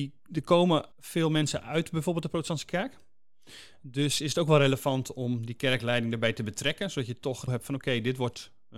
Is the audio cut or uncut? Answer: cut